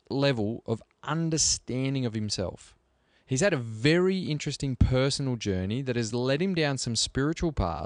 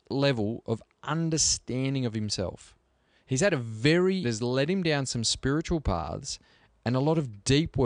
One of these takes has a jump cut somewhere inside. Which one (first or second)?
second